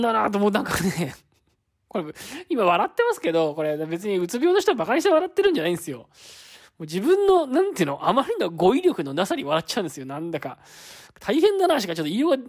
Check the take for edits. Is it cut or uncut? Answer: uncut